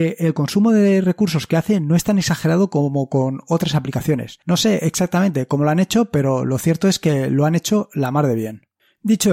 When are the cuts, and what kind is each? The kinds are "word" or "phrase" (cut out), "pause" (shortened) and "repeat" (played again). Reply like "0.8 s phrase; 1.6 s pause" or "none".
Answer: 4.4 s pause